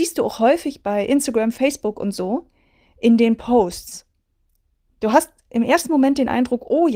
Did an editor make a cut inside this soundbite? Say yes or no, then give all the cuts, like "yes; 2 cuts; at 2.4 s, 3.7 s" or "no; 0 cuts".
no; 0 cuts